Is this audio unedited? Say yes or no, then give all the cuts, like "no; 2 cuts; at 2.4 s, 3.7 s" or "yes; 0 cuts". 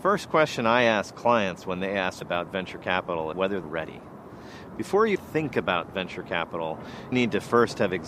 no; 5 cuts; at 2.2 s, 3.3 s, 3.6 s, 5.2 s, 7.1 s